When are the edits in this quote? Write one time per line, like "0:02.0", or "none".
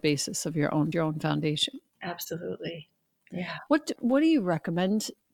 0:00.9
0:01.9
0:04.0